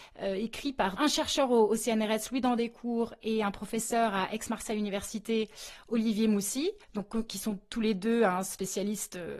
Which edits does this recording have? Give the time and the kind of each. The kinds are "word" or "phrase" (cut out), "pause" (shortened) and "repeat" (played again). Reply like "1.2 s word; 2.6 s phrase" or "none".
6.8 s pause